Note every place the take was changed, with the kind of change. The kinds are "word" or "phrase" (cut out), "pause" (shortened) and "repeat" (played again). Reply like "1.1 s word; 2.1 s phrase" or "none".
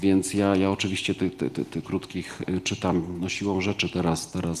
1.8 s phrase